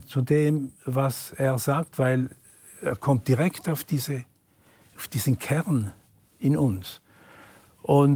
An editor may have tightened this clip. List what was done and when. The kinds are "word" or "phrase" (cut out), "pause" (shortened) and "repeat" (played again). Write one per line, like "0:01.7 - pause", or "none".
none